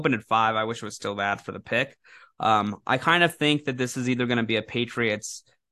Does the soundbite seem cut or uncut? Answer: uncut